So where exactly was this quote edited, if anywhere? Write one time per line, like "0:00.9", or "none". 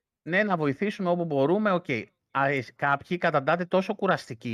none